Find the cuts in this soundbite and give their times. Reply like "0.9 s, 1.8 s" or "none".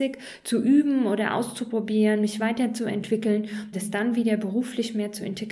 3.7 s